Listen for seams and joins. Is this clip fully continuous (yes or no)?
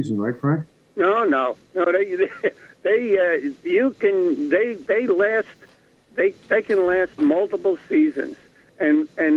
yes